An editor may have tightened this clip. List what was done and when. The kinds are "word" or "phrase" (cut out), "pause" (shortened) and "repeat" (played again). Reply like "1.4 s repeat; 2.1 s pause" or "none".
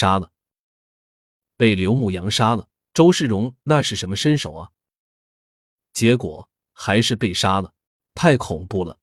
2.8 s pause; 7.8 s pause